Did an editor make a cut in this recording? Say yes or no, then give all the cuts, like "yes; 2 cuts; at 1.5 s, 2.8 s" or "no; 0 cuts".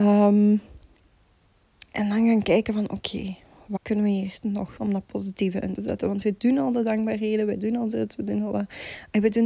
yes; 4 cuts; at 3.8 s, 4.4 s, 4.8 s, 5.8 s